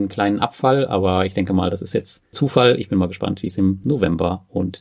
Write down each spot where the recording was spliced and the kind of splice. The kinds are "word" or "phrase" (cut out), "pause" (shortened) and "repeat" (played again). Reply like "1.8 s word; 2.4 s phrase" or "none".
2.3 s word